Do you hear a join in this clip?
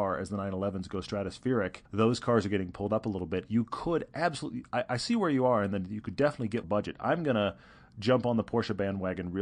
yes; 2 cuts; at 1.9 s, 6.6 s

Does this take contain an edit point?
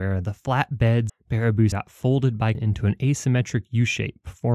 yes; 3 cuts; at 1.1 s, 1.7 s, 2.5 s

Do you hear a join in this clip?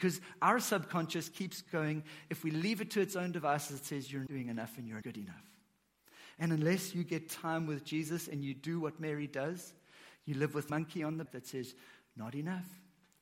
yes; 4 cuts; at 4.3 s, 5.0 s, 10.7 s, 11.3 s

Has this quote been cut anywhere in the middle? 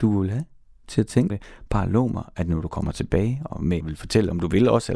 yes; 2 cuts; at 1.3 s, 3.8 s

